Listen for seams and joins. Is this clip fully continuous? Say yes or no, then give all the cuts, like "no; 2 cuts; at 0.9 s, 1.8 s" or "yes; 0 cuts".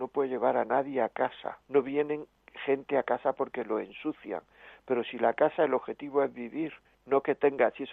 no; 2 cuts; at 1.6 s, 6.8 s